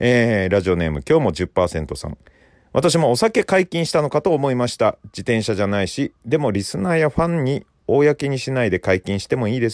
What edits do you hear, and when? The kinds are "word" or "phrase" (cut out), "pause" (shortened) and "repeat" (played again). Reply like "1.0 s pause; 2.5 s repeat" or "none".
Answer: none